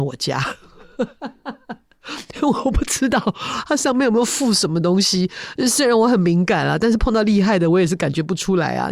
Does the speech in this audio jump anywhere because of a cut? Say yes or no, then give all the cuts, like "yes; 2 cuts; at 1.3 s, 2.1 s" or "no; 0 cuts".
no; 0 cuts